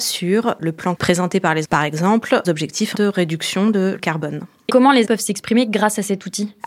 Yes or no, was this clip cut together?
yes